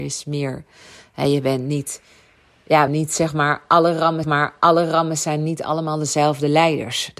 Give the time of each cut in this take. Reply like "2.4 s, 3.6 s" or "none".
2.9 s, 4.2 s